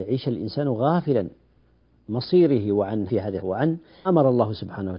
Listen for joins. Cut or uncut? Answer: cut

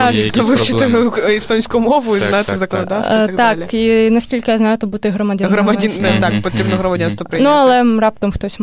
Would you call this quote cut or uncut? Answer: uncut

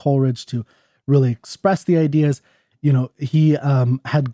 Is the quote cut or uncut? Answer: uncut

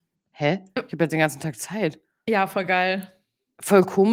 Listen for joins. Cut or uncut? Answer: uncut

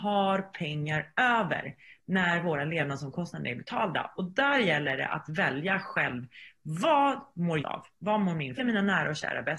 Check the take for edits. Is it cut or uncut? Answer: cut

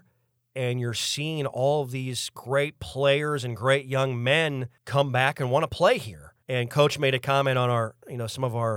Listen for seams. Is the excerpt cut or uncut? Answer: cut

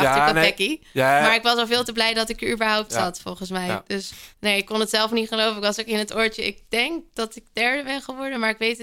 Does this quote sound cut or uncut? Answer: cut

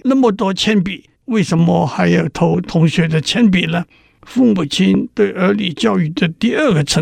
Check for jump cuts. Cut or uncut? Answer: cut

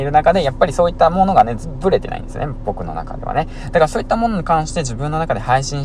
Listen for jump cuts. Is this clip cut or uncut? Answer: uncut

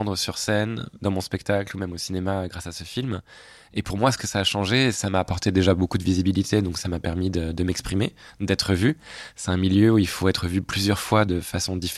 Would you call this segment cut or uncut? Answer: uncut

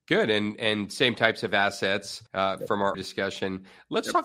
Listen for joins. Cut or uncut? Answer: cut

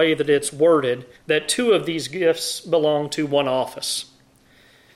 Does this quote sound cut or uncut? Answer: cut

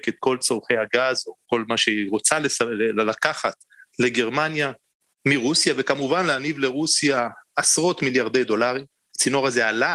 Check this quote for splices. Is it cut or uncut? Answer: uncut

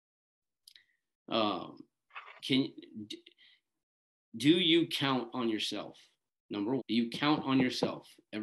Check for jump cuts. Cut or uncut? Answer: cut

